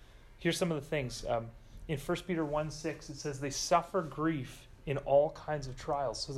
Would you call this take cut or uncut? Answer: uncut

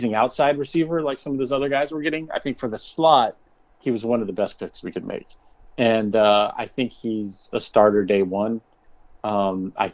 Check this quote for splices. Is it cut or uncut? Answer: uncut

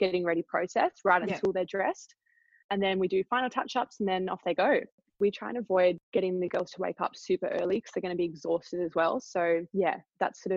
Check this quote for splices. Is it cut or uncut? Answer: uncut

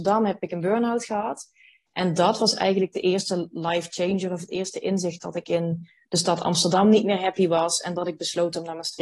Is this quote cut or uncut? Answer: uncut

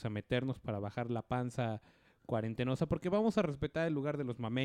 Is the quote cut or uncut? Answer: uncut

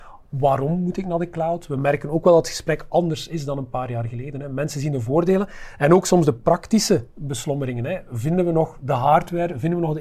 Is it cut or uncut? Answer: uncut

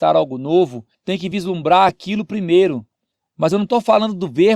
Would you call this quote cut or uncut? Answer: uncut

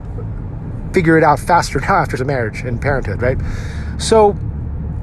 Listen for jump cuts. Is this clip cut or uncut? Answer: cut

